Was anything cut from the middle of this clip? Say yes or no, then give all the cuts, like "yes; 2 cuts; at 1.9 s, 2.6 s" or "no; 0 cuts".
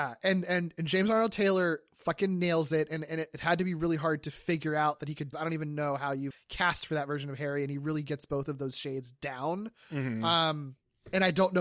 yes; 2 cuts; at 5.3 s, 6.3 s